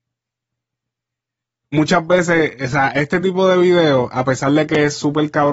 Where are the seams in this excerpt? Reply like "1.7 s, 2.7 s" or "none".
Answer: none